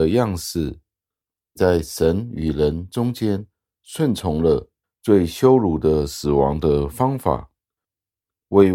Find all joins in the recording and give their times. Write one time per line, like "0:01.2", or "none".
none